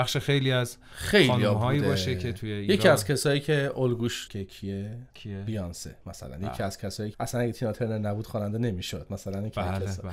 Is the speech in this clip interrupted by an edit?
yes; 3 cuts; at 4.3 s, 5.1 s, 7.1 s

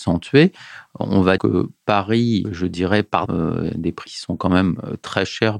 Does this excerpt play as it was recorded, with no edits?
no; 4 cuts; at 1.4 s, 2.4 s, 3.3 s, 4.1 s

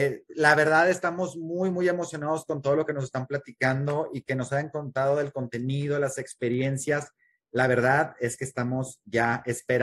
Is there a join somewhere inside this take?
no; 0 cuts

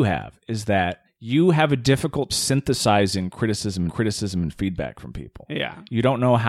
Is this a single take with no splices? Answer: no; 3 cuts; at 1.1 s, 2.3 s, 3.9 s

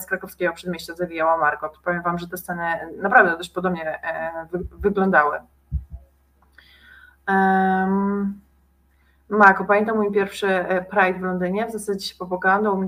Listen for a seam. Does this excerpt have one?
no; 0 cuts

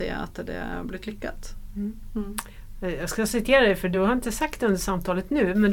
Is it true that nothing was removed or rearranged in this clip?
yes; 0 cuts

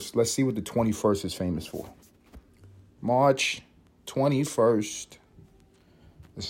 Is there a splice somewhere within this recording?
no; 0 cuts

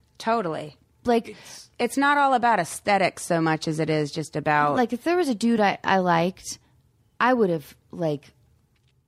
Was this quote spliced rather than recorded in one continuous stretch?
no; 0 cuts

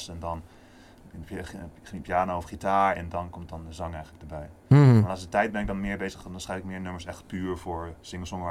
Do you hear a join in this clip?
no; 0 cuts

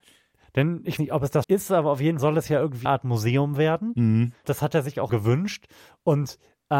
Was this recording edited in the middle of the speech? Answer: yes; 6 cuts; at 1.0 s, 1.4 s, 2.2 s, 2.9 s, 4.4 s, 5.1 s

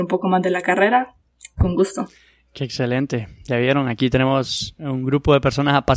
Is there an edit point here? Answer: no; 0 cuts

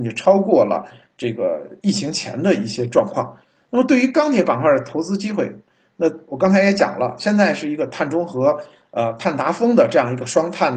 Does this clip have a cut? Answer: no; 0 cuts

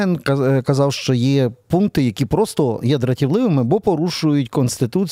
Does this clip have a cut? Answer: no; 0 cuts

